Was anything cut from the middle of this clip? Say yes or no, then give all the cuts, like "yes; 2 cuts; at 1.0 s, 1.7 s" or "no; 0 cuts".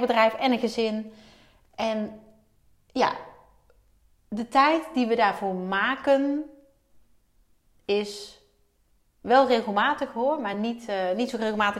no; 0 cuts